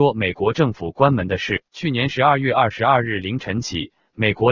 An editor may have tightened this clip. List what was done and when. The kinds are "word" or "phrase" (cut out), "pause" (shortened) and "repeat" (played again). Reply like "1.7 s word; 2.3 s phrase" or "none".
1.7 s pause